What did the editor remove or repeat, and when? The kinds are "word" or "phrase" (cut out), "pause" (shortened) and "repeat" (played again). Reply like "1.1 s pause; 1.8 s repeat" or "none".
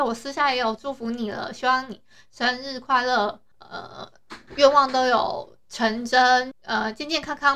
3.5 s pause; 6.5 s phrase